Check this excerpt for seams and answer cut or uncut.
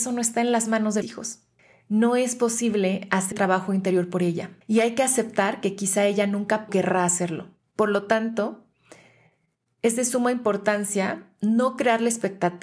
cut